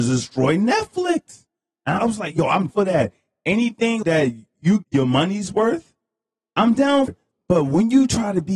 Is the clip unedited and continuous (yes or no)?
no